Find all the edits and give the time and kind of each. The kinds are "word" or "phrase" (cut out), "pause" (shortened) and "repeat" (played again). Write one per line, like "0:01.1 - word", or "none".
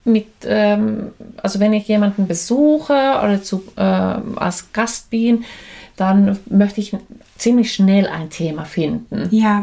none